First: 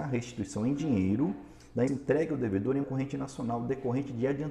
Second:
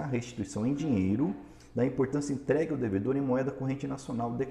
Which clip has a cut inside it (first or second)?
first